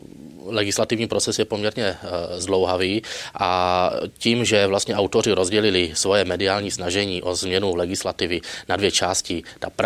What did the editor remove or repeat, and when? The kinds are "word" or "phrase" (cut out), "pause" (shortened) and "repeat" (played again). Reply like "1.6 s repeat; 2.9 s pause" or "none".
none